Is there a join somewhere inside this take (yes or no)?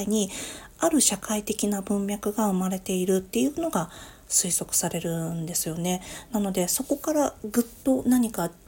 no